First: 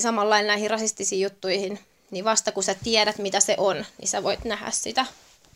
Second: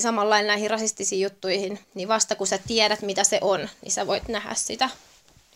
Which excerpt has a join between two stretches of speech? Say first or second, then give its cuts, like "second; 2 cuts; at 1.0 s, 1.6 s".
second; 1 cut; at 1.8 s